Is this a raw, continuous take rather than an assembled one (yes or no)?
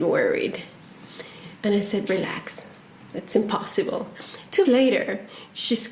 no